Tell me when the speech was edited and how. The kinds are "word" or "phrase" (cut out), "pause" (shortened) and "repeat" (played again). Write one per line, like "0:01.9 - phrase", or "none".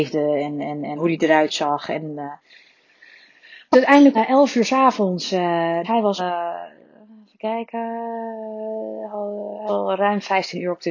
0:01.0 - word
0:03.7 - word
0:04.1 - word
0:05.8 - word
0:06.2 - word
0:09.7 - word